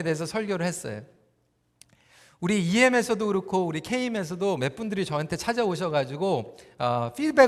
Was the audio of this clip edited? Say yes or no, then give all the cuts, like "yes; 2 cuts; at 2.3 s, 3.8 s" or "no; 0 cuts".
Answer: no; 0 cuts